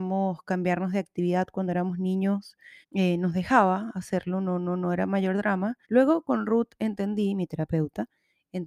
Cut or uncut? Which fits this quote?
cut